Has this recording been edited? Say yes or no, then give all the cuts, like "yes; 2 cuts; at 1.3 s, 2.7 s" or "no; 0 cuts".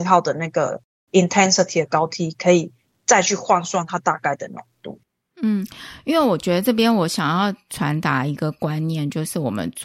no; 0 cuts